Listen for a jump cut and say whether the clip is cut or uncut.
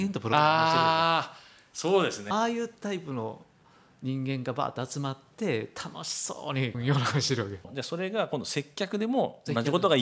uncut